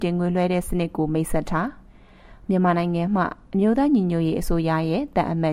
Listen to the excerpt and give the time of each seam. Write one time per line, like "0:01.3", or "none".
0:01.9